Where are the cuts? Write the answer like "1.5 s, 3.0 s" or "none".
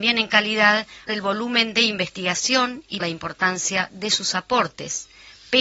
1.1 s, 3.0 s